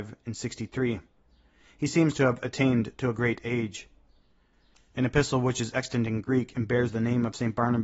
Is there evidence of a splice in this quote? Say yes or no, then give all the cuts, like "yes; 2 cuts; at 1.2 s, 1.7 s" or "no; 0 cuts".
no; 0 cuts